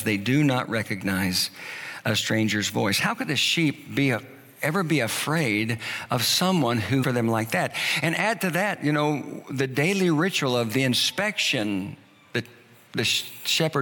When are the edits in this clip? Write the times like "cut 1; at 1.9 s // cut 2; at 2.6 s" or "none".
cut 1; at 7.0 s